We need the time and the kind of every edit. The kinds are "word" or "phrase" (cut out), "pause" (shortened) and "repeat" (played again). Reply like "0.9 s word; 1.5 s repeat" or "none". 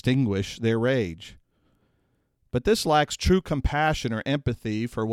none